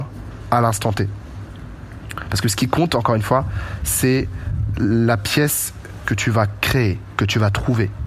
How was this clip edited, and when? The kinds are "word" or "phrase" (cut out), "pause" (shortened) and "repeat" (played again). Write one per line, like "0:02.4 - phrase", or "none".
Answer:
0:06.0 - word